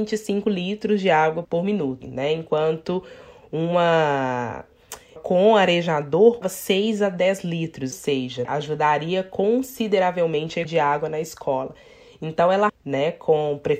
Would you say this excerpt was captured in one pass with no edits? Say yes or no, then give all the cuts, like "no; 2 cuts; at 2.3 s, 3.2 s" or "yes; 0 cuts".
no; 8 cuts; at 1.4 s, 2.0 s, 5.2 s, 6.4 s, 7.9 s, 8.4 s, 10.6 s, 12.7 s